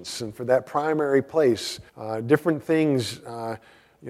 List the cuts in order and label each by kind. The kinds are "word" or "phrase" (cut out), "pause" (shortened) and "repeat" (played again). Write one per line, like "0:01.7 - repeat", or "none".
0:01.9 - pause

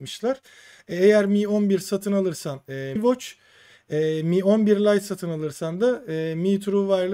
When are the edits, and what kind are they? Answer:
0:03.0 - word

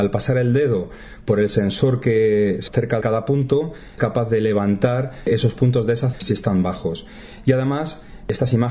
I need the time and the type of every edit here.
0:02.7 - word
0:03.0 - word
0:04.0 - word
0:06.1 - word

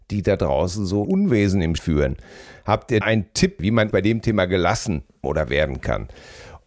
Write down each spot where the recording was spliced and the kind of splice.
0:01.0 - word
0:01.8 - word
0:03.0 - word
0:03.9 - word
0:05.2 - word

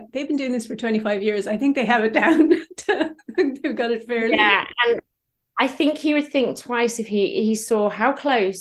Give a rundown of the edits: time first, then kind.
none

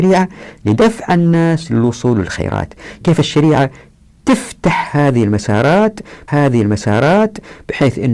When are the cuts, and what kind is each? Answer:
0:03.0 - word
0:06.3 - repeat

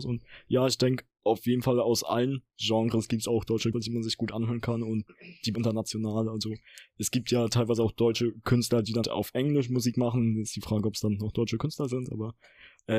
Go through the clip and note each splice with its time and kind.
0:03.7 - word
0:05.5 - phrase
0:09.0 - word

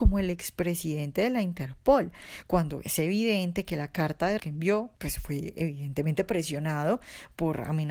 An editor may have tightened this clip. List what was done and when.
0:04.4 - word
0:04.9 - pause

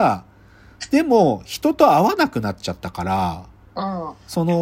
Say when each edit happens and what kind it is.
0:03.6 - pause

